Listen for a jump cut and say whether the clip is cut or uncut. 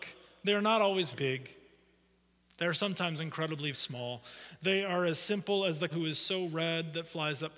cut